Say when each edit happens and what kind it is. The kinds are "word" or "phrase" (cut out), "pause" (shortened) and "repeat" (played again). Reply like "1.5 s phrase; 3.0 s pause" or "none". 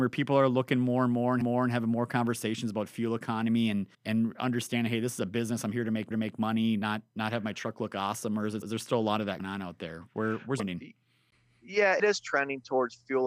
1.4 s repeat; 3.9 s pause; 6.1 s repeat; 8.6 s word; 9.4 s word; 10.6 s word; 12.0 s word